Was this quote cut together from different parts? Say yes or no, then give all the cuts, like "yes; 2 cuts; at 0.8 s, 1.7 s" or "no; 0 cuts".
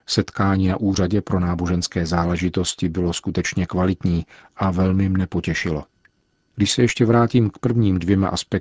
no; 0 cuts